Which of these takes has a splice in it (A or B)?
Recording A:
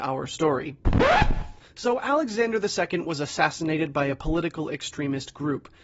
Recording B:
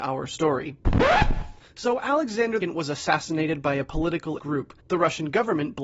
B